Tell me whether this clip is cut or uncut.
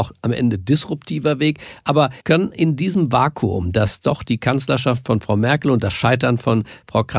cut